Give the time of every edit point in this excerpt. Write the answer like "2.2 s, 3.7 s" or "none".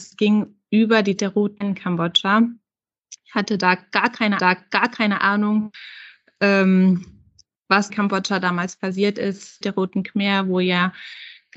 1.2 s, 1.6 s, 4.4 s, 7.9 s, 9.6 s